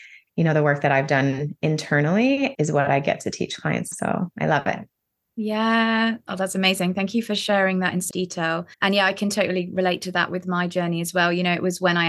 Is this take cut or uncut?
cut